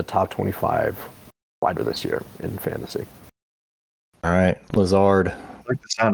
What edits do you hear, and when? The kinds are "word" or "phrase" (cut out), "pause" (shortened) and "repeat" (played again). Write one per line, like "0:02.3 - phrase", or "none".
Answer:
0:01.8 - word